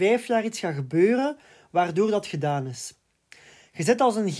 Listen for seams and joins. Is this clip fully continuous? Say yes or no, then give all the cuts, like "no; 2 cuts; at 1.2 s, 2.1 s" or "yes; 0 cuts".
yes; 0 cuts